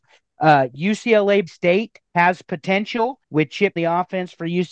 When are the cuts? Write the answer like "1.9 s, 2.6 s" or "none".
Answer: 1.5 s, 2.1 s, 3.2 s, 3.8 s